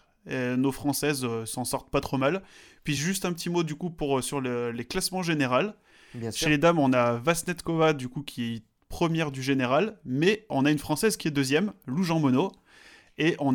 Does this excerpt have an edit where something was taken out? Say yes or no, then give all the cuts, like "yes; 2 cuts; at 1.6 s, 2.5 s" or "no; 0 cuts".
no; 0 cuts